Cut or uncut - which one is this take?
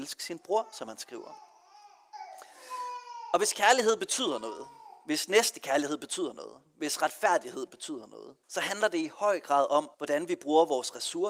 cut